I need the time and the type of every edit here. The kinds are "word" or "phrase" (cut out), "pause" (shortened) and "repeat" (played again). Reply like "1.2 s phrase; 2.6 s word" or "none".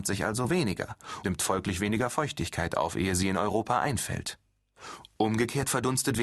1.2 s word